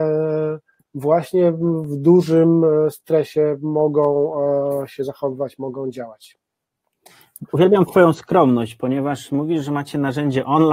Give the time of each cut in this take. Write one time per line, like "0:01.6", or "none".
0:07.5